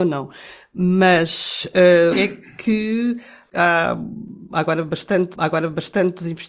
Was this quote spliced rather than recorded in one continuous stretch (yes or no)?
yes